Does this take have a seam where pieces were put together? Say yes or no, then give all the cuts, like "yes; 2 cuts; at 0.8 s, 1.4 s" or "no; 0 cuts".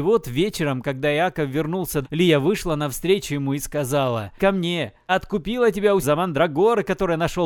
yes; 4 cuts; at 2.0 s, 4.4 s, 5.1 s, 6.0 s